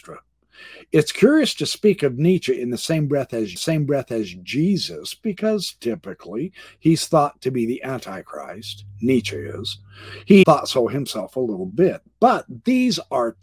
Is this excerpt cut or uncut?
cut